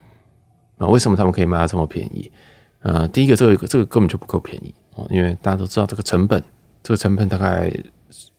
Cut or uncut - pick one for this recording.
uncut